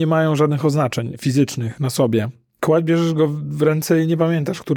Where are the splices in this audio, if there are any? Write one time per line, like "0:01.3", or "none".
none